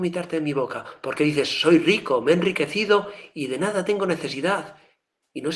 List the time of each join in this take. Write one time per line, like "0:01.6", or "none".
none